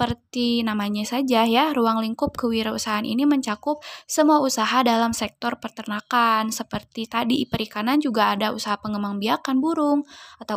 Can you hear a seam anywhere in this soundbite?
no; 0 cuts

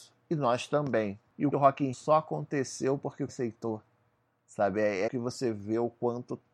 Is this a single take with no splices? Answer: no; 5 cuts; at 1.5 s, 1.9 s, 3.3 s, 4.3 s, 5.1 s

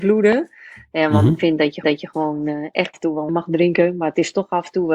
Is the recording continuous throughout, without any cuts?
no; 3 cuts; at 1.8 s, 2.9 s, 3.3 s

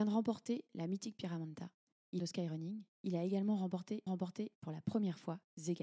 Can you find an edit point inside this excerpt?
yes; 2 cuts; at 2.2 s, 4.1 s

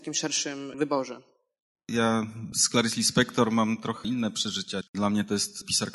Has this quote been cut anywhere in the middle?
no; 0 cuts

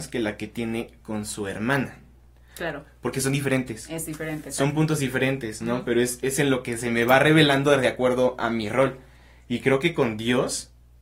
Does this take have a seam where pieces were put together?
no; 0 cuts

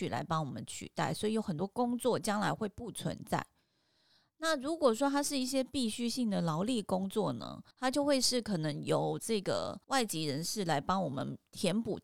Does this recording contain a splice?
yes; 2 cuts; at 7.7 s, 9.8 s

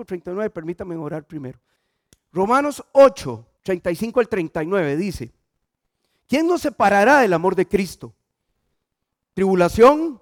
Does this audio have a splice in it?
yes; 1 cut; at 3.6 s

